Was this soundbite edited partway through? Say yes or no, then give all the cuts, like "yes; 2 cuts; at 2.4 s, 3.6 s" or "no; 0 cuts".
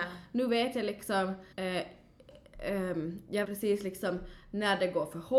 yes; 2 cuts; at 1.5 s, 3.4 s